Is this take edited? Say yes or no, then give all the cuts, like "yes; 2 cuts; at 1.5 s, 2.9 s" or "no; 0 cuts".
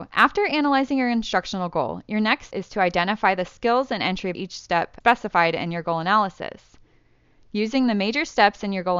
yes; 2 cuts; at 2.5 s, 4.3 s